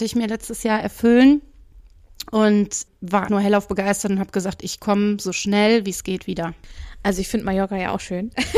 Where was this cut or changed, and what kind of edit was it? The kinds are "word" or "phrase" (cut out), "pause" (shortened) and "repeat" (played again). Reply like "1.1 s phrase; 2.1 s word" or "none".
3.3 s word

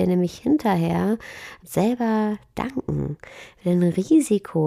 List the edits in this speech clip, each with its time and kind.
1.6 s word

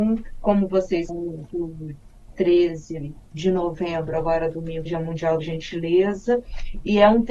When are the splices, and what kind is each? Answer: 1.1 s phrase; 2.3 s word; 3.2 s pause; 4.9 s phrase; 5.4 s word

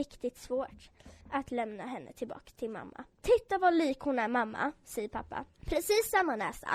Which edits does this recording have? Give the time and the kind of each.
1.2 s pause; 3.1 s pause; 5.5 s pause

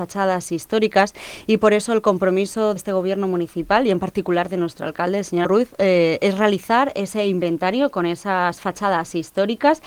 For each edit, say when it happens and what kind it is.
2.8 s word; 5.4 s phrase

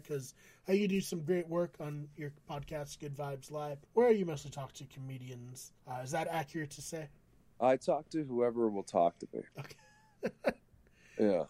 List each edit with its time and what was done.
3.8 s pause; 5.8 s pause; 7.3 s pause; 9.5 s pause

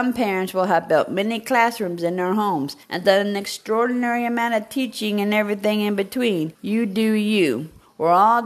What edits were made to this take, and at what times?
2.8 s pause; 6.6 s pause

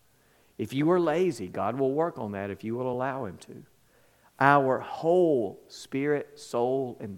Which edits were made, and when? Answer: none

